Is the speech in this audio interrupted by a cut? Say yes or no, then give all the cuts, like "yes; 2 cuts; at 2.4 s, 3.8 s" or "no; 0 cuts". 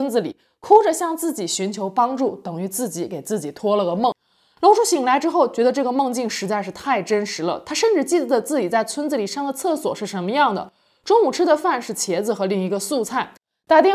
no; 0 cuts